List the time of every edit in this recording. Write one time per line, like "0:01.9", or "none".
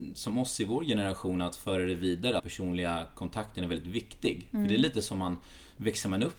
0:02.4